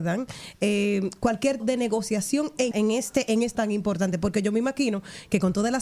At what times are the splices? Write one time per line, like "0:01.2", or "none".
0:01.6
0:02.7
0:03.5